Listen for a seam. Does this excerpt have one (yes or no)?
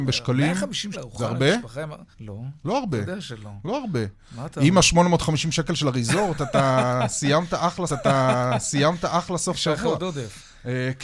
yes